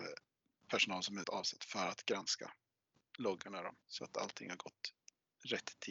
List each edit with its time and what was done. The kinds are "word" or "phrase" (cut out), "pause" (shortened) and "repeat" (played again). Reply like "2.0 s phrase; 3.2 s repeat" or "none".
1.2 s word; 3.0 s word; 3.8 s pause